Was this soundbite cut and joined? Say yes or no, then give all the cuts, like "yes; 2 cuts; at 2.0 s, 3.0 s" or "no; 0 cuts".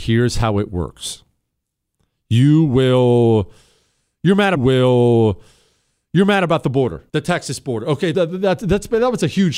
yes; 3 cuts; at 4.6 s, 7.1 s, 8.1 s